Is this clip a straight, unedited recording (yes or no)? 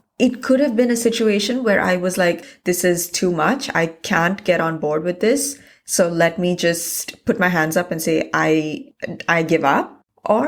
yes